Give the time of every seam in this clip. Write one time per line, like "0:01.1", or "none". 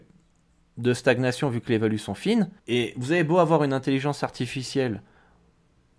0:02.6